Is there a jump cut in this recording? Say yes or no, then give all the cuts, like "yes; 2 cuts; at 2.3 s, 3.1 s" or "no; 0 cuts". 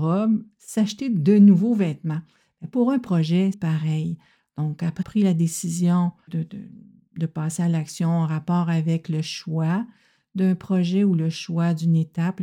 yes; 3 cuts; at 3.5 s, 5.0 s, 6.3 s